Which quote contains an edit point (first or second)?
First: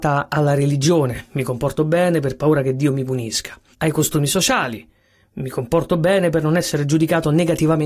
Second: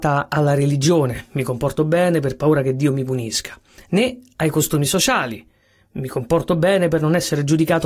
first